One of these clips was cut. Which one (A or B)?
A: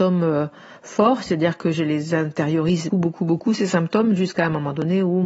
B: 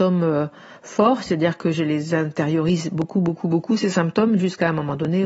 A